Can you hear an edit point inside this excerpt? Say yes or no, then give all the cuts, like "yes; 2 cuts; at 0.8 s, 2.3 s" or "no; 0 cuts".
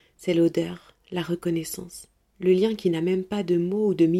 yes; 1 cut; at 2.2 s